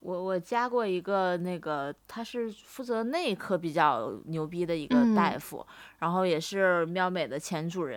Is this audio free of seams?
no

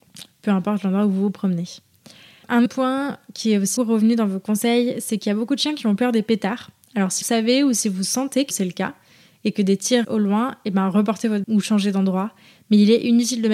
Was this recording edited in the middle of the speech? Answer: yes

